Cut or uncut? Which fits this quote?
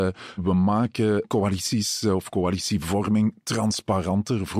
uncut